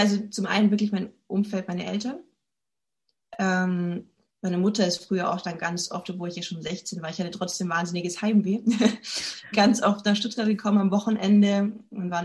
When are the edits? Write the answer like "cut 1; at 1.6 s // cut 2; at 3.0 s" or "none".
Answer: cut 1; at 9.5 s